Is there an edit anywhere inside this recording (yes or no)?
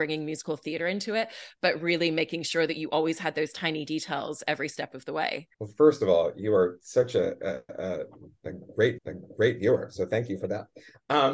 yes